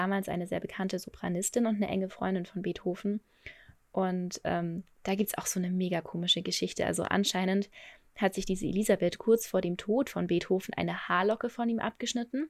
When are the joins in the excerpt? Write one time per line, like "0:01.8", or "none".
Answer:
none